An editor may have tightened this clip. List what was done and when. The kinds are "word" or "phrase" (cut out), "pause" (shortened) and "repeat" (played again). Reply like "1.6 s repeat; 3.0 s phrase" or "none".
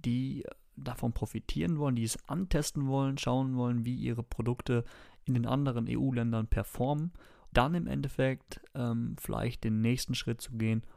7.5 s word